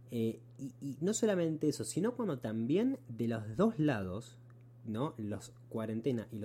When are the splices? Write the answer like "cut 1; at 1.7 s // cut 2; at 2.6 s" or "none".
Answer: none